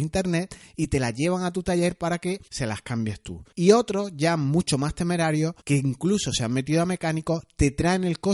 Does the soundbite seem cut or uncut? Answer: cut